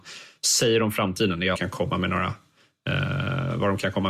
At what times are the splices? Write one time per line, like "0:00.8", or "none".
0:01.5